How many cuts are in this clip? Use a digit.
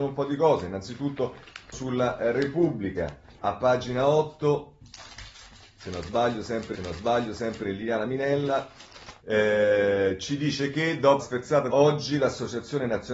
6